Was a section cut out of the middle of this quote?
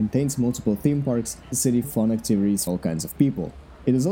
yes; 3 cuts; at 1.5 s, 1.8 s, 2.7 s

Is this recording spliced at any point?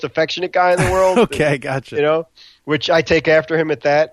no; 0 cuts

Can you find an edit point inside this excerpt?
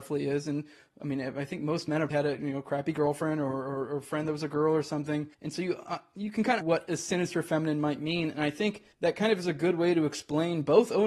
yes; 4 cuts; at 2.1 s, 5.3 s, 6.6 s, 8.9 s

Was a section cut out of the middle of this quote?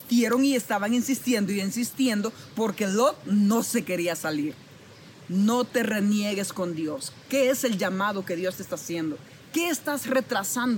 no; 0 cuts

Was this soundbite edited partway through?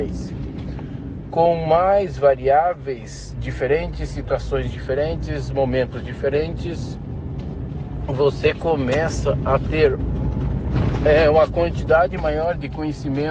no; 0 cuts

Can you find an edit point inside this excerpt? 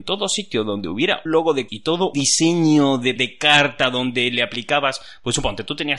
yes; 4 cuts; at 1.3 s, 1.7 s, 2.1 s, 3.2 s

